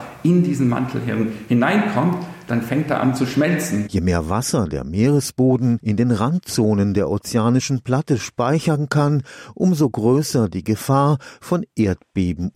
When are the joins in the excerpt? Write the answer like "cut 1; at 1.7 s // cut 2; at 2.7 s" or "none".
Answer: none